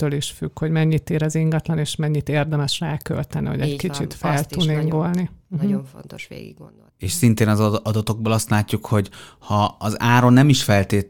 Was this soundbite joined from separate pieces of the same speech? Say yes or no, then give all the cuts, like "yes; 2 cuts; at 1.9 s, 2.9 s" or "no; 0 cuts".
yes; 1 cut; at 6.9 s